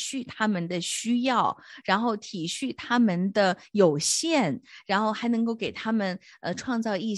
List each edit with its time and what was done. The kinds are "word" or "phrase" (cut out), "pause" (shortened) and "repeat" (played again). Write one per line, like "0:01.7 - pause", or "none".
none